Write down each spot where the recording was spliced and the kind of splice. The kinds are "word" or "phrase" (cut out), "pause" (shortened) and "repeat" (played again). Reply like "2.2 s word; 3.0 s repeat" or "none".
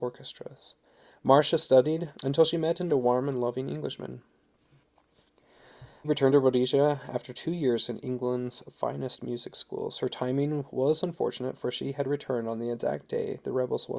2.1 s pause; 2.9 s word; 6.0 s word